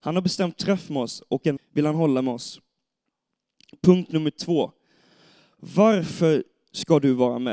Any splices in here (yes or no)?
yes